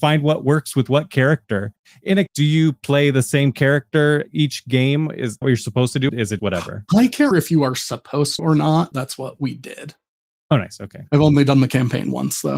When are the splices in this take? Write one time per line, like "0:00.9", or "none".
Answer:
0:02.3
0:05.4
0:06.1
0:06.4
0:07.3
0:08.4
0:08.9